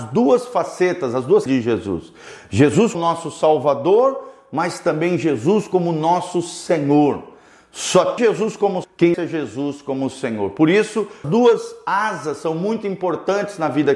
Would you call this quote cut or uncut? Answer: cut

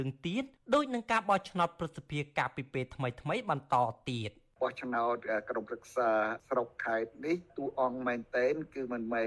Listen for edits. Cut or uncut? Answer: uncut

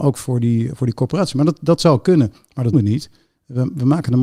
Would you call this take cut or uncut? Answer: cut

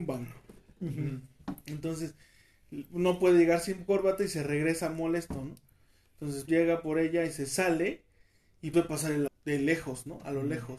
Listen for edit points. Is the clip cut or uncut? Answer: cut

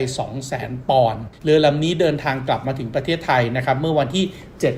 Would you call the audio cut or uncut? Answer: cut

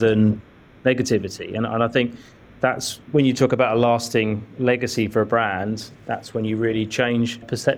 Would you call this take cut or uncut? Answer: uncut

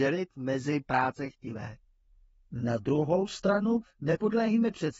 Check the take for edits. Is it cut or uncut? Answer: uncut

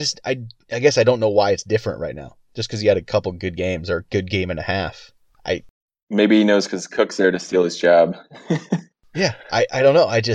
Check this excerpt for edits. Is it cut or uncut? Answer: uncut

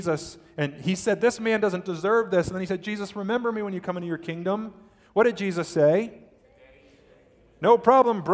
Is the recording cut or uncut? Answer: uncut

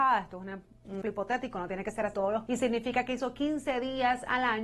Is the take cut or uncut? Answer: cut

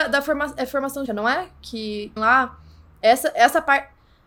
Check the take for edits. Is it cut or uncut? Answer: cut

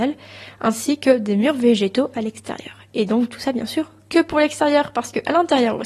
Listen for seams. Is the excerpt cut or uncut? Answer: uncut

